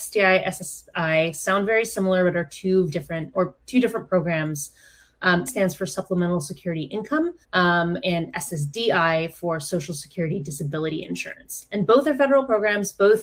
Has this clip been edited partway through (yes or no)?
yes